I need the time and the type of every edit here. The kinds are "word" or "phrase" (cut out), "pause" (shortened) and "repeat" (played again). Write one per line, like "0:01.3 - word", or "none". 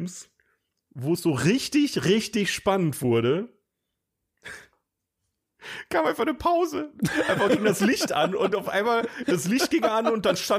none